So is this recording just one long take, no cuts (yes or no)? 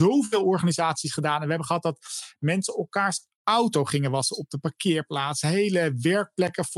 yes